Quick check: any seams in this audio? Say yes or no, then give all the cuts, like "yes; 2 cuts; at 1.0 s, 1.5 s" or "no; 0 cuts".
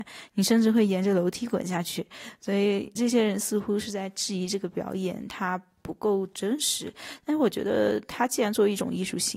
yes; 1 cut; at 3.0 s